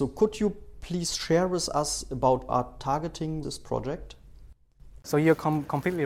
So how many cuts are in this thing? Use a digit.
2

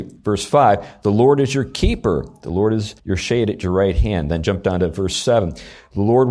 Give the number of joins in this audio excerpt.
1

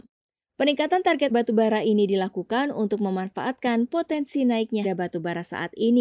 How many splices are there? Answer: 2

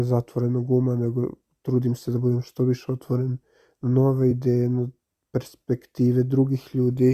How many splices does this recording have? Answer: 0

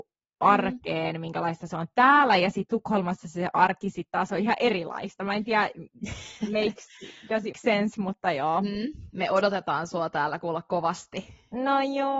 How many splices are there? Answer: 1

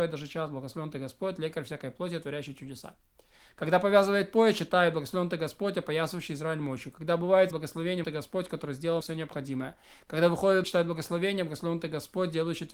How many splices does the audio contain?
4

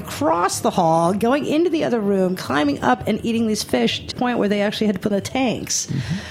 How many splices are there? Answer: 2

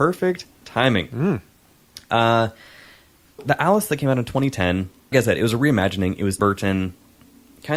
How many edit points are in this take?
3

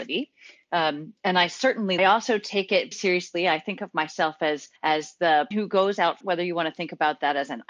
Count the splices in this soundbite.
5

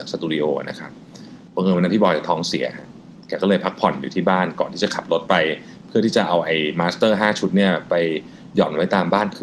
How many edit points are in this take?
1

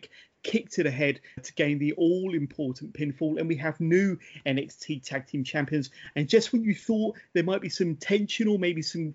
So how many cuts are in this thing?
1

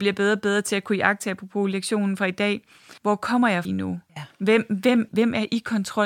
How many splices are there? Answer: 4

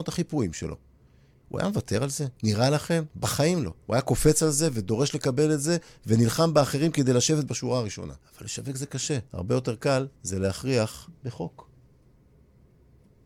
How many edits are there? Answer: 7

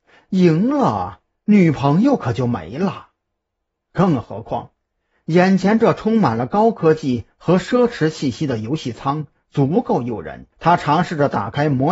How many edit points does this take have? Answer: 1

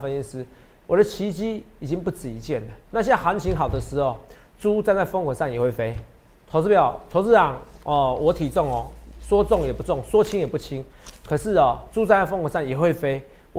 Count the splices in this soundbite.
1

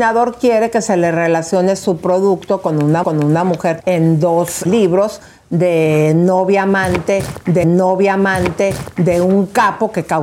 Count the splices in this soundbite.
4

